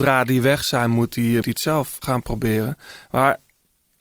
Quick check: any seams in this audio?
yes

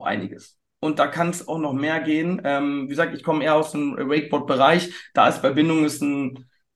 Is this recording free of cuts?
yes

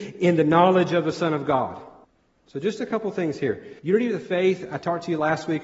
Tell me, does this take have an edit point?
yes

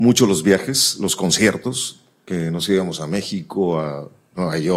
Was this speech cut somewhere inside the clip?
no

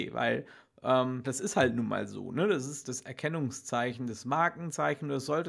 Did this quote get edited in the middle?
yes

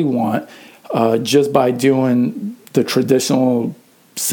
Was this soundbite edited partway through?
yes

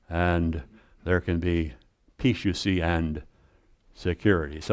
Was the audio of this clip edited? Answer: no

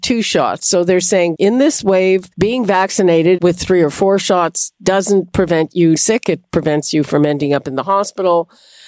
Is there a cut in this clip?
yes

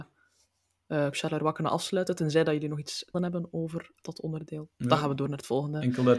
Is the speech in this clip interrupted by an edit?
yes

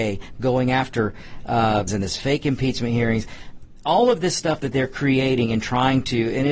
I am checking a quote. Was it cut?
yes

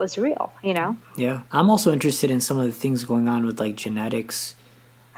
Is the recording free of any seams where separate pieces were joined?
no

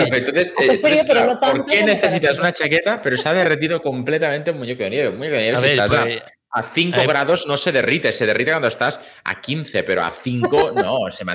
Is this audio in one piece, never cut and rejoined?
yes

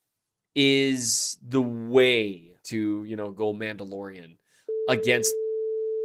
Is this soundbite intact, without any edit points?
no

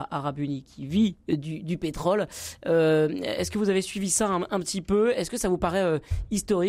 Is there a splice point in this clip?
no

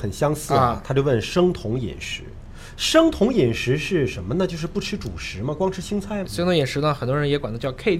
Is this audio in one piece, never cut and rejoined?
yes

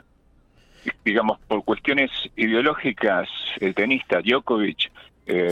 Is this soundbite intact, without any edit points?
no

